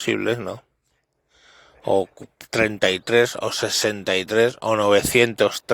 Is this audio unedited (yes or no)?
yes